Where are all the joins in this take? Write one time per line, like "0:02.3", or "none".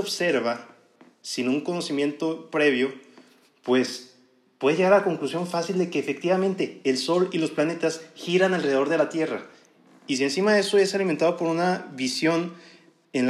none